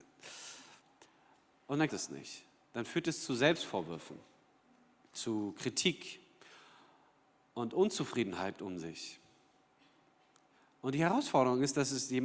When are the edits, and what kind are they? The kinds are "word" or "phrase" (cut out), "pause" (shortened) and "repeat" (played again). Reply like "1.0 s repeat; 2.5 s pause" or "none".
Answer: 1.9 s word; 8.6 s word